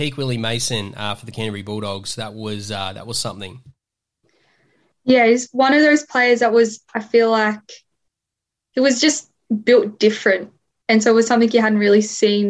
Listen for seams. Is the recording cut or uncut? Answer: uncut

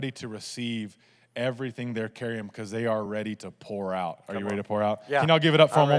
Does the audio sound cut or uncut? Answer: uncut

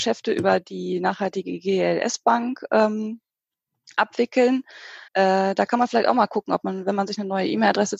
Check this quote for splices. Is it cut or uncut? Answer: cut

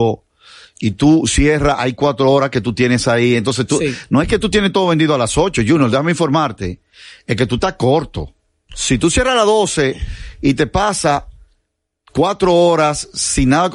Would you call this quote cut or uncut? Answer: uncut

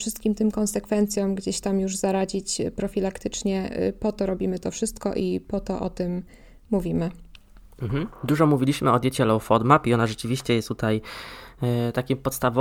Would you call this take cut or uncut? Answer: uncut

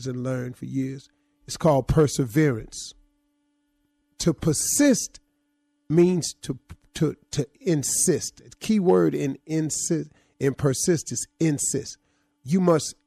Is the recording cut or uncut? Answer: uncut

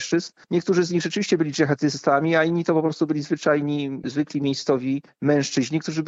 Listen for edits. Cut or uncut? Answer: uncut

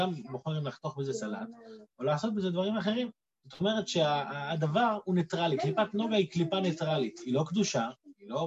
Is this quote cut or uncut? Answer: cut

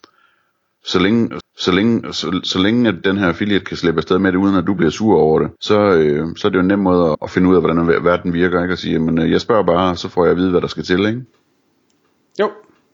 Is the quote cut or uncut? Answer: cut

